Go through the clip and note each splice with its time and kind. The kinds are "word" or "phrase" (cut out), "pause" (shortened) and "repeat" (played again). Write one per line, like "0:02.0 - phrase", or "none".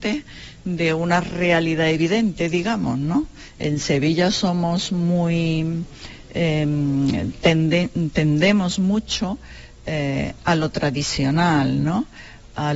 none